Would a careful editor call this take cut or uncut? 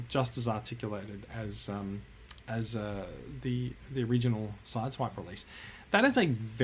uncut